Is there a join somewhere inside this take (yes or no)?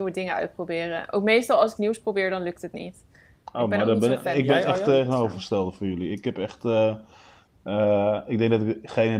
yes